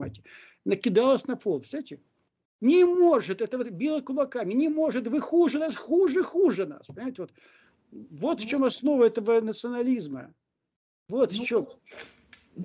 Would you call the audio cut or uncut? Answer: uncut